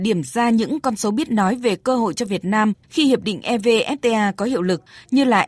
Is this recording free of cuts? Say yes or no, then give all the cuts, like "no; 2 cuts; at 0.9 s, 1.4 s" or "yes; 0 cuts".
yes; 0 cuts